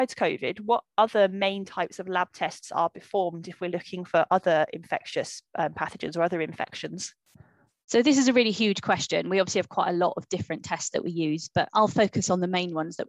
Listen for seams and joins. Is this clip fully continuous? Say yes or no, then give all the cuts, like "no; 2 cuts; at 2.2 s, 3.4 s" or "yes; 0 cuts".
no; 2 cuts; at 7.7 s, 11.7 s